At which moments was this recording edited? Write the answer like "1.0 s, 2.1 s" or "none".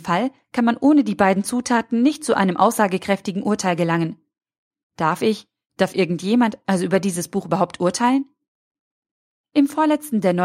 none